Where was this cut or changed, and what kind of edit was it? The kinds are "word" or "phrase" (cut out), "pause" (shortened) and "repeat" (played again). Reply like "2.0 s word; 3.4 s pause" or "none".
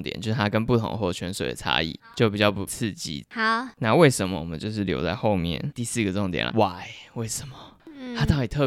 6.5 s word